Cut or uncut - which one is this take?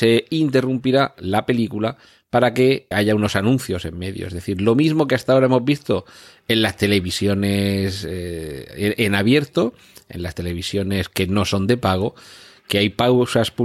cut